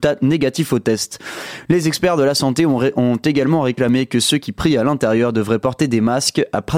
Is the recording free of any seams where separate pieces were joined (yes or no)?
yes